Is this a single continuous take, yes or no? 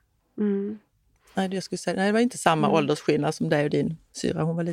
yes